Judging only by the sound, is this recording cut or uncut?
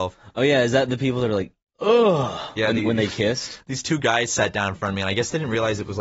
uncut